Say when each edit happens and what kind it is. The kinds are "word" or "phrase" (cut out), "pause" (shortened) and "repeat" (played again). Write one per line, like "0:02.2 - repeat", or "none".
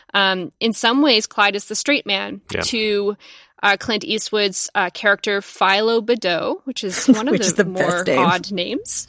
none